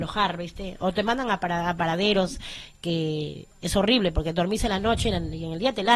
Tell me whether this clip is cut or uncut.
uncut